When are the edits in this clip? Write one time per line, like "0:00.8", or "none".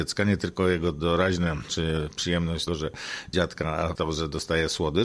0:01.7
0:02.7
0:03.3
0:04.0